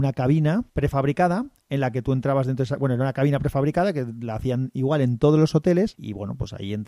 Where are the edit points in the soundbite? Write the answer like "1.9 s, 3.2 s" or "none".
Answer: 6.0 s